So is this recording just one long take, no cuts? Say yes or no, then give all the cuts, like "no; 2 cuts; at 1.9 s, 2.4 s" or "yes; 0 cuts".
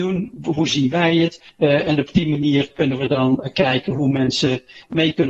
no; 1 cut; at 1.5 s